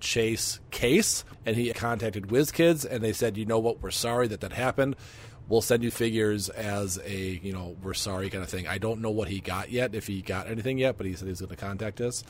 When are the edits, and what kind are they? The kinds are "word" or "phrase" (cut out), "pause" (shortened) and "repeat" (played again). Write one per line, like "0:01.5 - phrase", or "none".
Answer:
0:01.3 - pause
0:01.7 - word
0:05.9 - word